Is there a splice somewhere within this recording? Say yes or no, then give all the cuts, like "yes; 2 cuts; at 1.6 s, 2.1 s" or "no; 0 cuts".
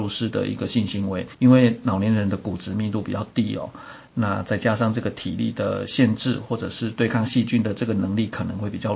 yes; 1 cut; at 1.3 s